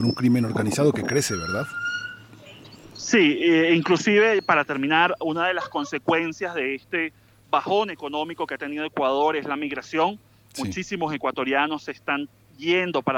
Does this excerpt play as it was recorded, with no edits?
yes; 0 cuts

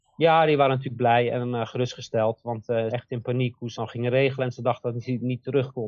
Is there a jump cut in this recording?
yes; 2 cuts; at 2.9 s, 3.7 s

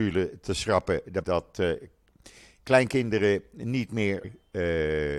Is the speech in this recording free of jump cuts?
no; 2 cuts; at 1.2 s, 4.2 s

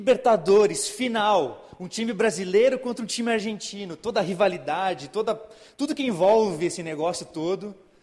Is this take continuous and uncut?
yes; 0 cuts

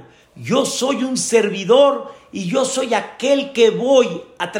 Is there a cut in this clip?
no; 0 cuts

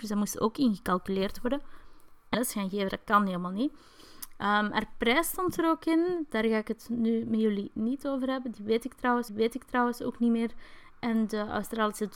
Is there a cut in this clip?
yes; 2 cuts; at 2.3 s, 9.3 s

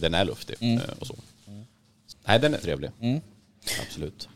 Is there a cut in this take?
yes; 2 cuts; at 2.1 s, 2.6 s

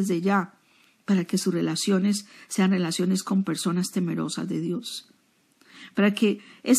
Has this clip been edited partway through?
no; 0 cuts

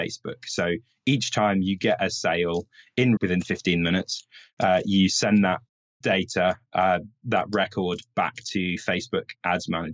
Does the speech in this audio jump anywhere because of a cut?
yes; 1 cut; at 3.2 s

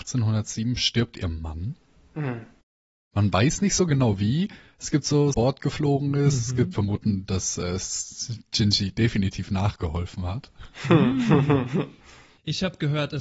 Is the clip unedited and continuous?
no; 2 cuts; at 5.3 s, 6.7 s

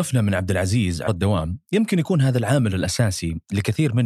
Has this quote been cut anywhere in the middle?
yes; 1 cut; at 1.1 s

